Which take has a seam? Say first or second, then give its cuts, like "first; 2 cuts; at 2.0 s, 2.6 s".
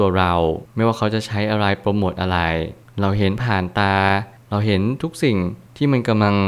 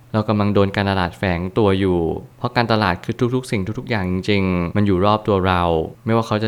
second; 1 cut; at 4.7 s